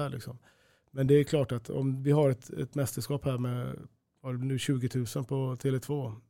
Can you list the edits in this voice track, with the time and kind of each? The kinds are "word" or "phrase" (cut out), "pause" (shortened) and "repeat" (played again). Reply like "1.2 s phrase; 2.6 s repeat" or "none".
none